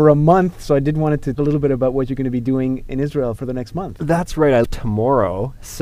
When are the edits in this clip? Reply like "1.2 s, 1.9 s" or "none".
1.3 s, 3.4 s, 4.6 s